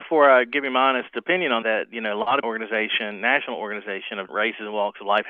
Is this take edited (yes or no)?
yes